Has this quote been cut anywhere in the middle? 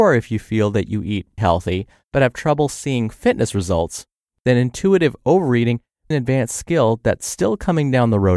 yes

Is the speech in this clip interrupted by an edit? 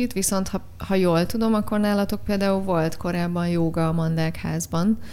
no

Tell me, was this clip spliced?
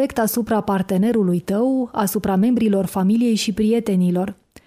no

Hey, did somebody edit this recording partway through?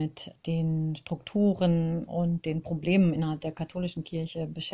no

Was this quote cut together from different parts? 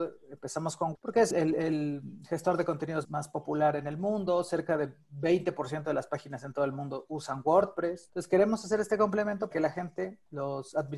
yes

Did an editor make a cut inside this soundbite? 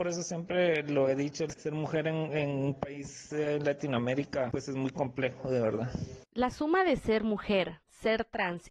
no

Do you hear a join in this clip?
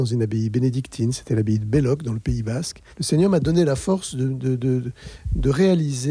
yes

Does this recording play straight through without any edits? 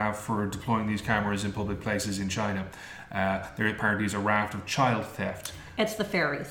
yes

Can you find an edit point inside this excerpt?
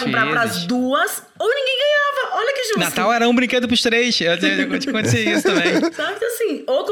no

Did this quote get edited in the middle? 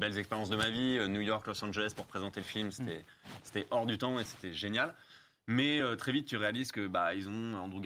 no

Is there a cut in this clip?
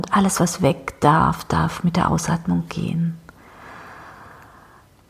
no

